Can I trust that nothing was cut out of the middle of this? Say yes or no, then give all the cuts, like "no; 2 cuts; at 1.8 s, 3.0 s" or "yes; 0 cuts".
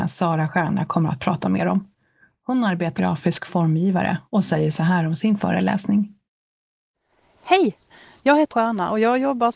no; 2 cuts; at 3.0 s, 8.5 s